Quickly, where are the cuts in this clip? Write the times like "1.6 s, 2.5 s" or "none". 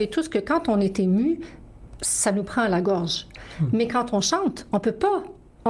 none